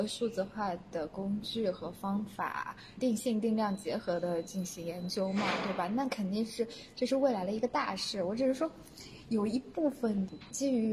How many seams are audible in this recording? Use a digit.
1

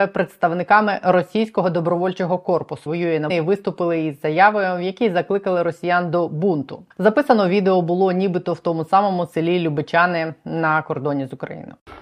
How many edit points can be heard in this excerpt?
3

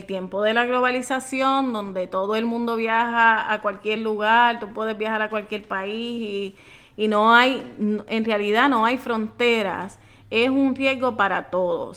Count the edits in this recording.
0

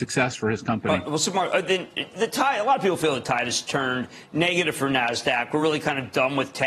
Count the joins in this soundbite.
0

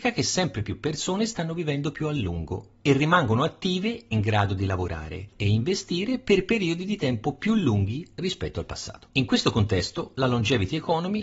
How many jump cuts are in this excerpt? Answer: 3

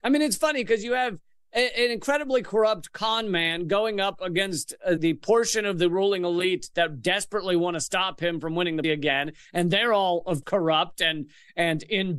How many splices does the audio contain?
3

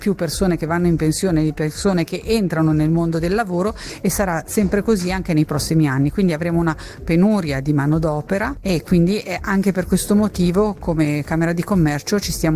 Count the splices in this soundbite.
0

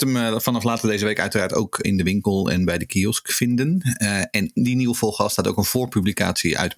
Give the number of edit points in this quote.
2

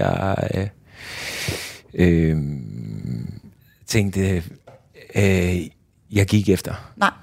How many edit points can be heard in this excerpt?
0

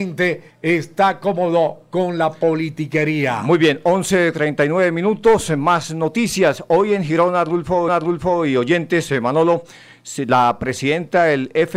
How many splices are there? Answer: 1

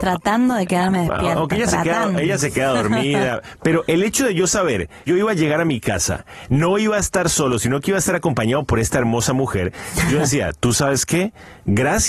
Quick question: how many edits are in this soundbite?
1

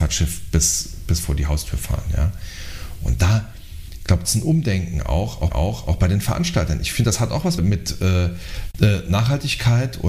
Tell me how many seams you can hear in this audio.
3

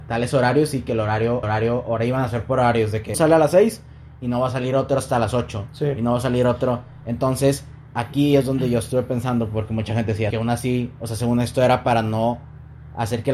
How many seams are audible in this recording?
3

